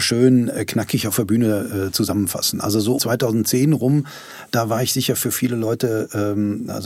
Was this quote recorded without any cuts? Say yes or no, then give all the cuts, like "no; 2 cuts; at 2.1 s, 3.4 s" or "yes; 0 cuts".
no; 1 cut; at 3.0 s